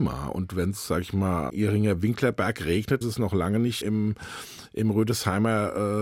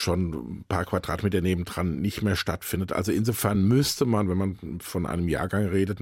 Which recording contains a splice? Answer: first; 3 cuts; at 1.5 s, 3.0 s, 3.8 s

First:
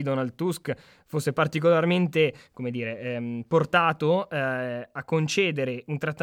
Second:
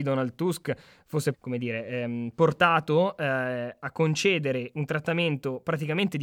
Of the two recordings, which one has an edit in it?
second; 1 cut; at 1.3 s

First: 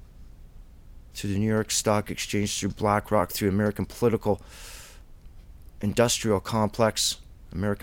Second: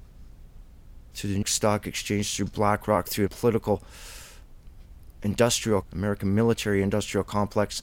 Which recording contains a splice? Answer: second; 3 cuts; at 1.4 s, 3.3 s, 5.8 s

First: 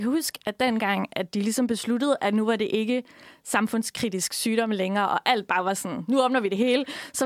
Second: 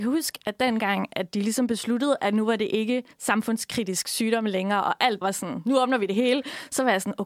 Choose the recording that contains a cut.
second; 2 cuts; at 3.1 s, 5.2 s

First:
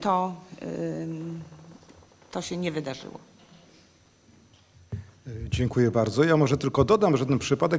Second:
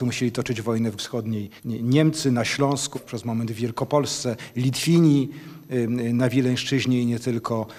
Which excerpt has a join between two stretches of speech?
second; 3 cuts; at 1.0 s, 1.6 s, 2.9 s

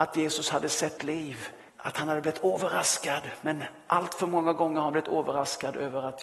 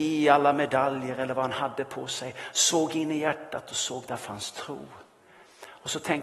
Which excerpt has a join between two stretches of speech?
first; 2 cuts; at 1.0 s, 1.7 s

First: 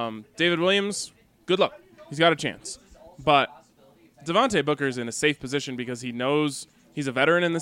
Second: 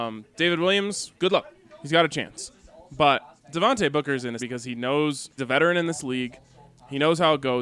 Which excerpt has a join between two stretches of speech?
second; 4 cuts; at 1.2 s, 3.4 s, 4.4 s, 5.4 s

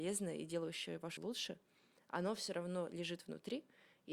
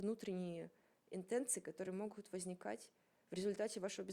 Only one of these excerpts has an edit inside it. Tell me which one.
first; 1 cut; at 1.2 s

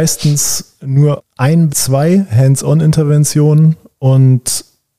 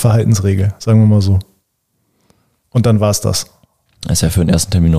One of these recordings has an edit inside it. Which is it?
first; 2 cuts; at 1.2 s, 1.7 s

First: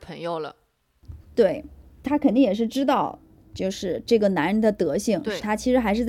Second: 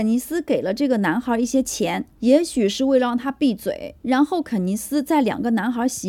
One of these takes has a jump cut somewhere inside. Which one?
second; 1 cut; at 4.0 s

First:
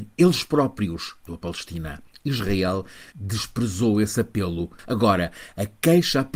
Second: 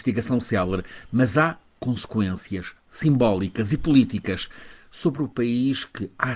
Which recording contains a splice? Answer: first; 2 cuts; at 1.3 s, 3.1 s

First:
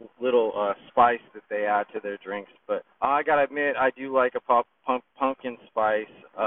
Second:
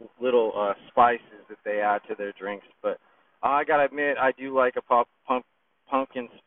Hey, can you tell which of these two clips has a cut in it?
first; 3 cuts; at 1.3 s, 2.9 s, 5.1 s

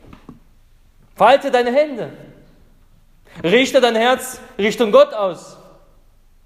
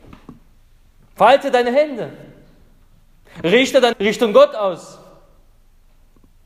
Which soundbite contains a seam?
second; 1 cut; at 3.9 s

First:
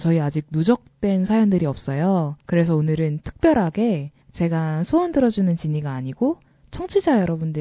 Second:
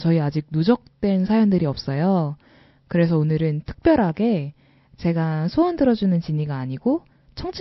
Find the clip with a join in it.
first; 2 cuts; at 2.4 s, 4.2 s

